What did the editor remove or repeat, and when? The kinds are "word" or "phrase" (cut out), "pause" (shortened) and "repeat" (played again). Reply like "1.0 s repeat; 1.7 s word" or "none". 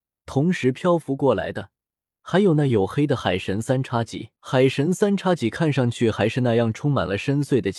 4.4 s pause